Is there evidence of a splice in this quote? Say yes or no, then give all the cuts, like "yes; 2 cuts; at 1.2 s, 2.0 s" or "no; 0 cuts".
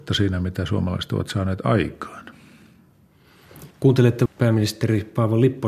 yes; 1 cut; at 3.7 s